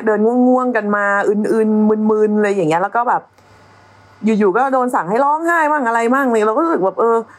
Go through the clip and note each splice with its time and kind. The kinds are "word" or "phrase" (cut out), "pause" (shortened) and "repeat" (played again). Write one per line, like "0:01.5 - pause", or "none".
none